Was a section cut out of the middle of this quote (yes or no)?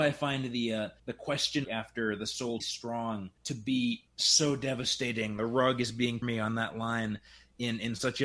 yes